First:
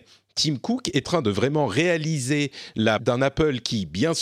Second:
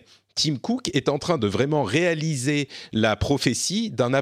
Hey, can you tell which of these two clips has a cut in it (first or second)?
first